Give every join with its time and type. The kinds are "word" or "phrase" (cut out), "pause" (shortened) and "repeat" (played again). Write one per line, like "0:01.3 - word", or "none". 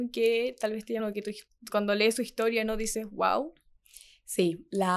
0:01.0 - phrase
0:01.7 - word